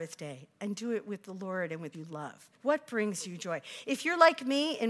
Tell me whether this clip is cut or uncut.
cut